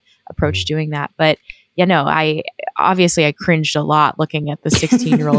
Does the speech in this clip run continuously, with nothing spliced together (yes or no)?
yes